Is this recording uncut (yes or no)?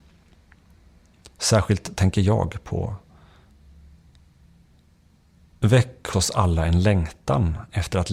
no